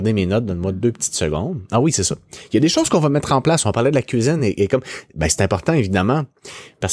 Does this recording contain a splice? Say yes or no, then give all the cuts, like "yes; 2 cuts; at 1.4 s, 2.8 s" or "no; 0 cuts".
no; 0 cuts